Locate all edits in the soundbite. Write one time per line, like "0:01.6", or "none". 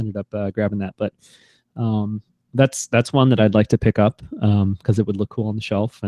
none